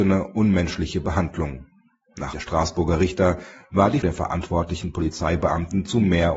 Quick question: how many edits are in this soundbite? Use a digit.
2